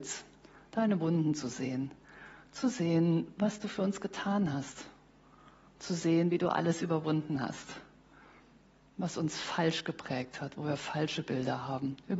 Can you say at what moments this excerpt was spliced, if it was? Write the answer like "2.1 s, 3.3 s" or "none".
none